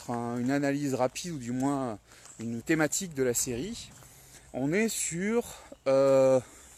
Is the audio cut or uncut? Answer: cut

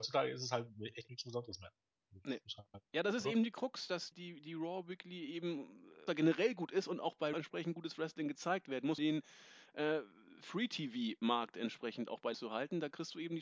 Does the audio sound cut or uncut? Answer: cut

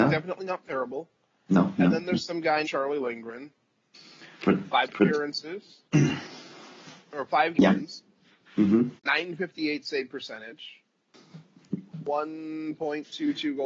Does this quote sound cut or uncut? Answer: cut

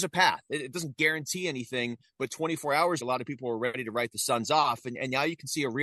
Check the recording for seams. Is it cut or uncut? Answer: cut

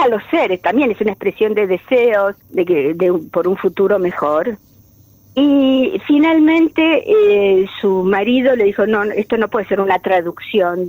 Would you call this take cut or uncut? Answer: cut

